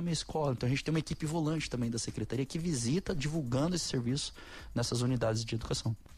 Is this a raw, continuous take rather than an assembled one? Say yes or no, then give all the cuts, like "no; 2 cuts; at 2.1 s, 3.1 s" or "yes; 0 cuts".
yes; 0 cuts